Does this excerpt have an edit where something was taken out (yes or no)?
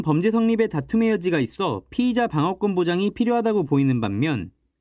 no